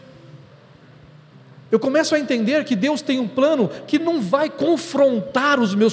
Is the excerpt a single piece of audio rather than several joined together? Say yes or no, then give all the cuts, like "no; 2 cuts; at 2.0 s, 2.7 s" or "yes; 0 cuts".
no; 1 cut; at 1.7 s